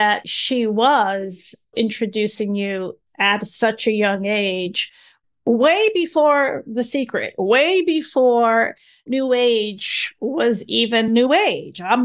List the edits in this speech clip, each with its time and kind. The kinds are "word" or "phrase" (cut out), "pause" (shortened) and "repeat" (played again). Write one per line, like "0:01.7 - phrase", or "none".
none